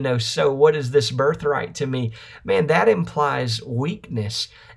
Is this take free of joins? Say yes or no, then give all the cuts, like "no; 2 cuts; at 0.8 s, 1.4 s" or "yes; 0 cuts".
yes; 0 cuts